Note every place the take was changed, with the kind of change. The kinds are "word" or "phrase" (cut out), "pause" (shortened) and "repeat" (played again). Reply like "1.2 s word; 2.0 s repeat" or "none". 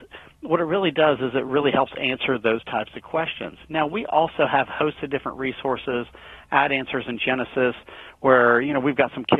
none

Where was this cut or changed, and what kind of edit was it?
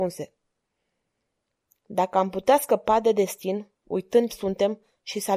4.3 s word

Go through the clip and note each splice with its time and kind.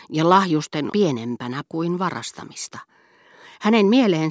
0.9 s word; 1.7 s word

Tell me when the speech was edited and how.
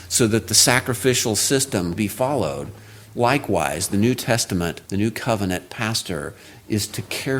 2.0 s word; 4.9 s pause

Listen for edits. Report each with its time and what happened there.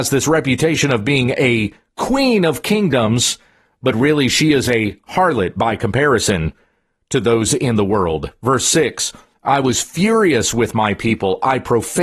none

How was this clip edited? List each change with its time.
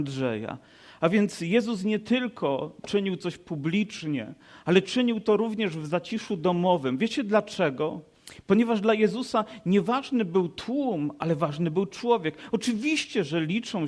none

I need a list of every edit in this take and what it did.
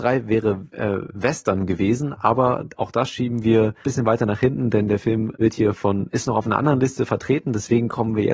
3.8 s phrase; 5.3 s word

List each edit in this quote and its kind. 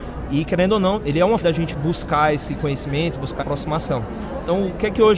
0.9 s word; 1.4 s word; 3.4 s word

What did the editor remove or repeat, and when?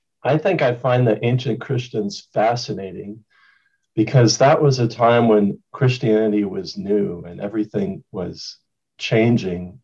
none

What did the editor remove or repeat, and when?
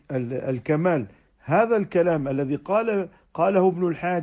none

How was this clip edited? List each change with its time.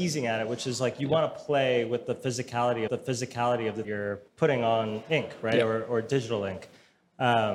2.9 s repeat; 3.8 s phrase; 4.3 s pause

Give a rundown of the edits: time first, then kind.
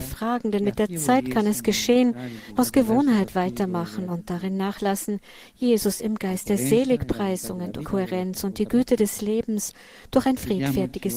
2.6 s phrase; 7.8 s word

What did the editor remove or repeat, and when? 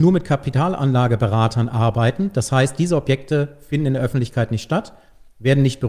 none

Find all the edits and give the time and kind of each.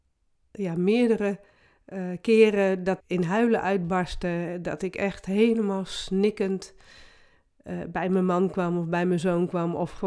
3.0 s word

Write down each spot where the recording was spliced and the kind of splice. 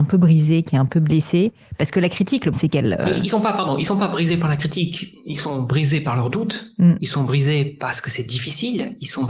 2.5 s word

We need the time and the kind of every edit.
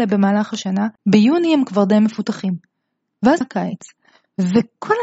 1.0 s pause; 3.4 s word

